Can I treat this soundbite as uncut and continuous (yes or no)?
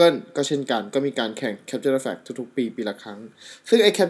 yes